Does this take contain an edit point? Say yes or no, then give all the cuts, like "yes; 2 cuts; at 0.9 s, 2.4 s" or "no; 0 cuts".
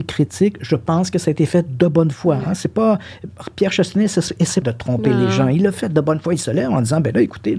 yes; 1 cut; at 4.6 s